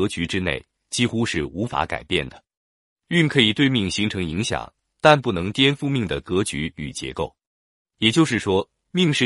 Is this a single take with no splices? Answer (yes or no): yes